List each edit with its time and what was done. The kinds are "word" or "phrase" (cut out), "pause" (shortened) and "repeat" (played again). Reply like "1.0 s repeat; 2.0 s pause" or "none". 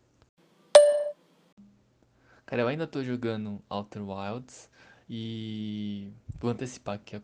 5.0 s pause